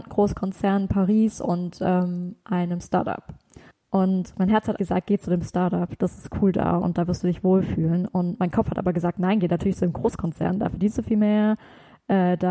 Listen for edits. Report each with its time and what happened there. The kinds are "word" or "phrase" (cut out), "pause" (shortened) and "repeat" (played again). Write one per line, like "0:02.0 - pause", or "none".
0:03.7 - pause
0:04.8 - word